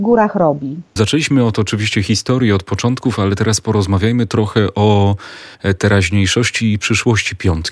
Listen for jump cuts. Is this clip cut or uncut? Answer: cut